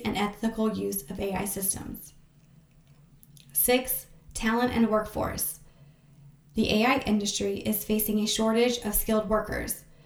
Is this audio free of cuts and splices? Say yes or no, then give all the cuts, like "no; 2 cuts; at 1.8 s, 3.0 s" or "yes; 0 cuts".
yes; 0 cuts